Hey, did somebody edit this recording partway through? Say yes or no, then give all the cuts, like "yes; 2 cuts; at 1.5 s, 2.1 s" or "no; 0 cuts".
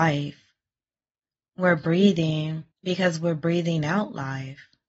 yes; 1 cut; at 2.7 s